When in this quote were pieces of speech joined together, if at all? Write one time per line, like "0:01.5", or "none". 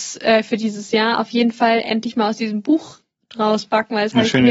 none